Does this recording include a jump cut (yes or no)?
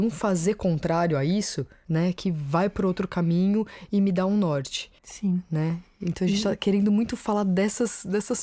yes